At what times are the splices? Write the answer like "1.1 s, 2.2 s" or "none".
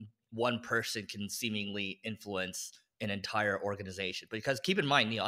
none

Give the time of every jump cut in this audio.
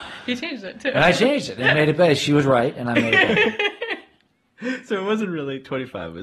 none

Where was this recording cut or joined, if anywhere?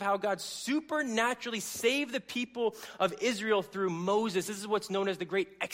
none

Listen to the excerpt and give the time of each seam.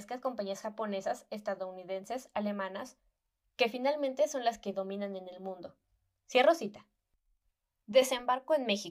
none

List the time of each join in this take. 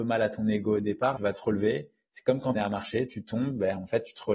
1.2 s, 2.5 s

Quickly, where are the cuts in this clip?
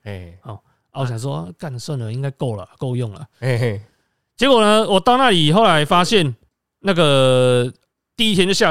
6.5 s

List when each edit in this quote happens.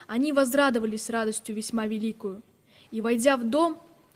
none

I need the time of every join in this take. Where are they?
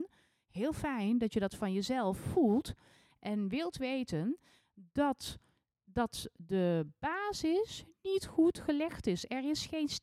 none

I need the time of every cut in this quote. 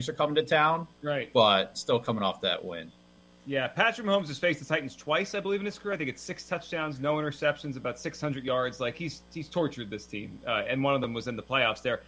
none

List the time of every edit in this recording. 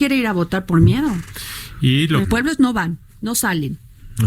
2.2 s, 2.6 s

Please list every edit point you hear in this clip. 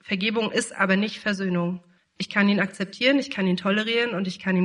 2.0 s

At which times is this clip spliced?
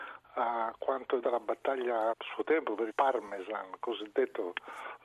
1.2 s, 2.1 s, 2.9 s

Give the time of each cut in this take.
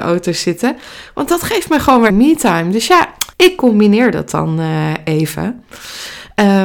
2.1 s, 3.3 s

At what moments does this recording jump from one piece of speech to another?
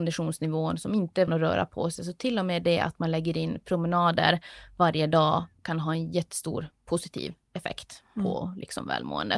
1.3 s

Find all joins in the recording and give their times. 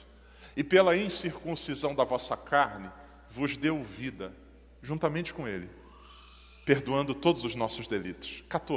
none

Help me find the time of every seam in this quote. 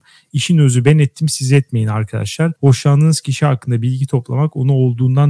2.6 s

